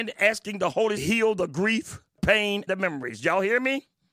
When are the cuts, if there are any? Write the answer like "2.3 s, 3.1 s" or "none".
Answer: 1.0 s, 2.2 s, 2.7 s